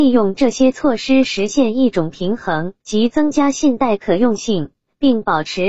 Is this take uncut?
no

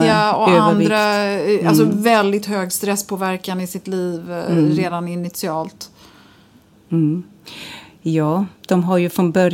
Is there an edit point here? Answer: yes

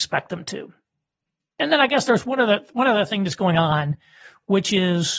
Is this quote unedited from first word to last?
yes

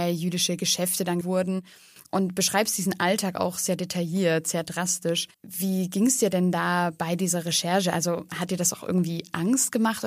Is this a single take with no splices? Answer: no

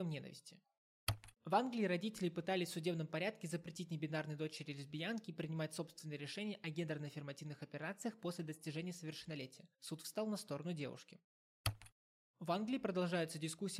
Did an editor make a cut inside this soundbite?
yes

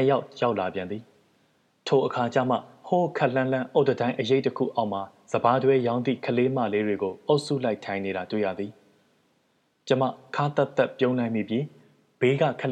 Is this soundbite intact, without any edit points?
yes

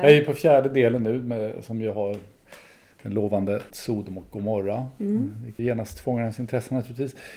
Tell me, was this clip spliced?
yes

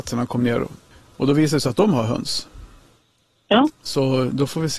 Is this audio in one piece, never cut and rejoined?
no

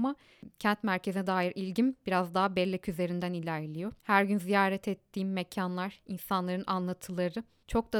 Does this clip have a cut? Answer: yes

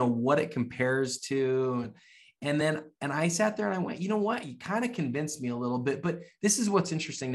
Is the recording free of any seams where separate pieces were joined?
yes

